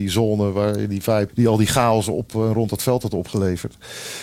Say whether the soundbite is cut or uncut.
cut